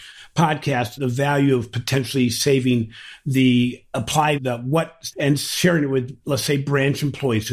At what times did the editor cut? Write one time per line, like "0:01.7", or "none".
0:01.0
0:04.4
0:05.1